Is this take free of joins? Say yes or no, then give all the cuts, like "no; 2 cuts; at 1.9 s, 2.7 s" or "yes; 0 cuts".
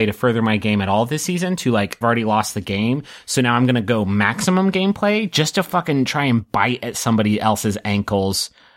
no; 1 cut; at 2.0 s